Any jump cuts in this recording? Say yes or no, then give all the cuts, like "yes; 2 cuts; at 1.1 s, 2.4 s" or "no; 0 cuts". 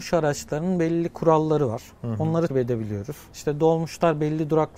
yes; 1 cut; at 2.5 s